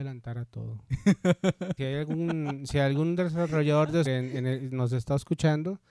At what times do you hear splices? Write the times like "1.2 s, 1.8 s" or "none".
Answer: 1.8 s, 4.0 s

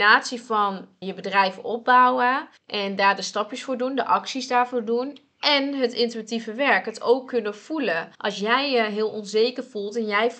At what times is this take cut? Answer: 1.0 s, 2.6 s, 5.3 s, 8.1 s

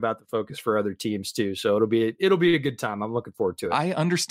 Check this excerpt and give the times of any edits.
none

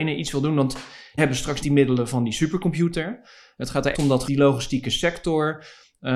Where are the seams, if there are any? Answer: 1.2 s, 1.6 s, 3.9 s, 4.2 s

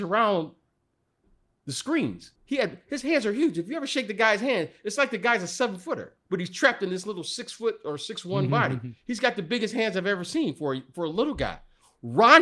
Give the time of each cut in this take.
2.4 s, 6.2 s

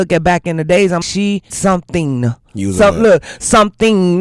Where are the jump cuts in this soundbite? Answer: 1.0 s, 1.5 s

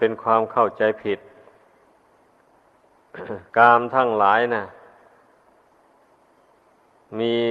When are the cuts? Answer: 3.5 s

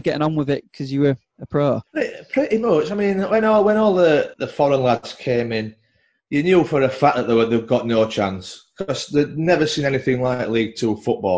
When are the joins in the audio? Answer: none

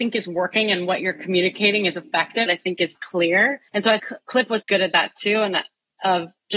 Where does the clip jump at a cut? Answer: 2.5 s, 2.9 s, 3.7 s, 4.0 s, 4.6 s

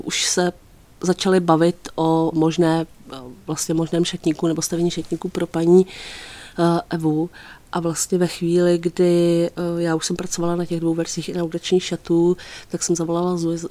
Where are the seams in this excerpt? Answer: 2.3 s

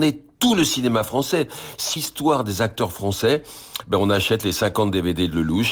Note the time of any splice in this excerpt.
2.0 s

